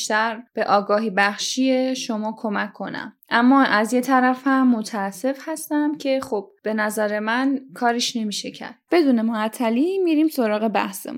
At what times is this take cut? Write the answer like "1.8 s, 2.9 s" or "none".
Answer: 3.2 s, 8.9 s